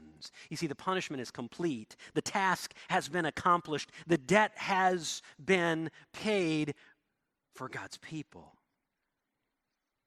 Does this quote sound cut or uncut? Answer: uncut